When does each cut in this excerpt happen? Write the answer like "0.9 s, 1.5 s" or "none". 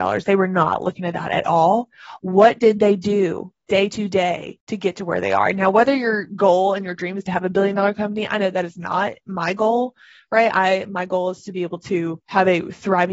none